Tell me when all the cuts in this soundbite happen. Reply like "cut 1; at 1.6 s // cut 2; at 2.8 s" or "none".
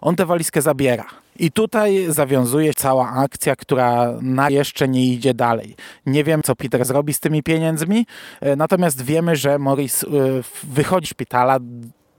cut 1; at 2.7 s // cut 2; at 4.5 s // cut 3; at 6.4 s // cut 4; at 11.1 s